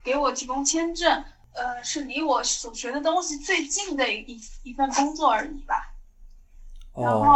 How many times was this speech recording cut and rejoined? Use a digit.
0